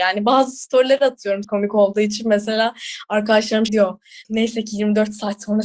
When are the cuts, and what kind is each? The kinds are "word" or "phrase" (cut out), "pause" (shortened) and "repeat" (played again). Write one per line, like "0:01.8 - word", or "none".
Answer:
0:01.4 - word
0:03.7 - word
0:04.2 - pause

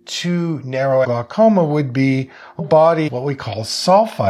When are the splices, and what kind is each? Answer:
0:01.0 - word
0:02.6 - word
0:03.1 - word

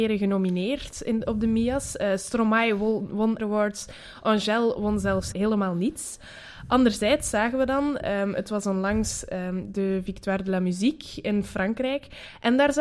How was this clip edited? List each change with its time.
0:03.4 - phrase
0:05.3 - word

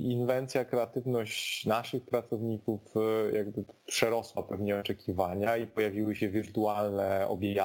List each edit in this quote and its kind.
none

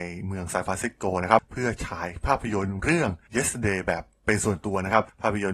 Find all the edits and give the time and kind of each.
none

